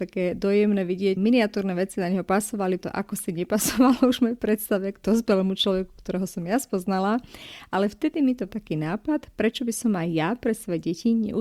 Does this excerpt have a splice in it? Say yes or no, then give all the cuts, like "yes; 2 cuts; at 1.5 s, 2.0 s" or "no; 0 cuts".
yes; 4 cuts; at 1.2 s, 2.8 s, 5.0 s, 8.5 s